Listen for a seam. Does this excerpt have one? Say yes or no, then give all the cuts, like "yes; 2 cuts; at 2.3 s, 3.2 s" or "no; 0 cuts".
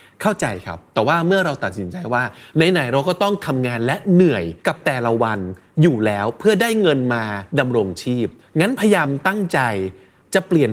yes; 3 cuts; at 4.6 s, 7.5 s, 8.4 s